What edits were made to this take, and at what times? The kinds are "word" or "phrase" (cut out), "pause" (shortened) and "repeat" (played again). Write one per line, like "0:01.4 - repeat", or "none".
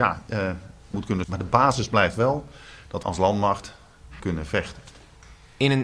0:00.9 - word
0:01.2 - word
0:03.0 - word
0:04.2 - word